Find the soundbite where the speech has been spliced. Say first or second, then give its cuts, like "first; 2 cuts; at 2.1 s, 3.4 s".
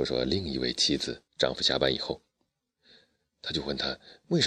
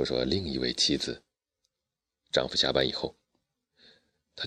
first; 1 cut; at 1.3 s